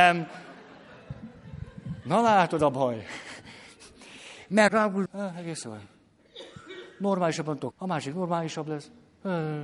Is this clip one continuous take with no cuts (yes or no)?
no